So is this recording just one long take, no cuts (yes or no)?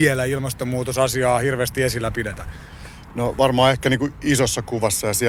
yes